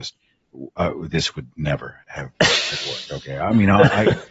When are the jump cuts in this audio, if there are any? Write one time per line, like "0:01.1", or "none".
0:02.0